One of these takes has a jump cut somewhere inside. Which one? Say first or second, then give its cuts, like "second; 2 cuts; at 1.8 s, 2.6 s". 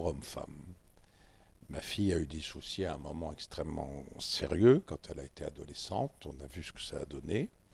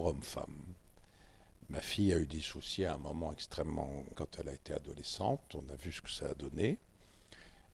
second; 1 cut; at 4.1 s